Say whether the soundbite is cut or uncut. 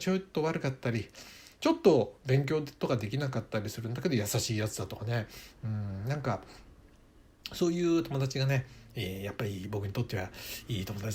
uncut